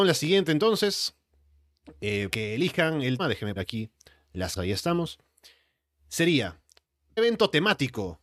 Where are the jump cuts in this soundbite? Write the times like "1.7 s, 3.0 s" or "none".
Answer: 2.3 s, 3.2 s, 3.6 s, 4.6 s, 7.2 s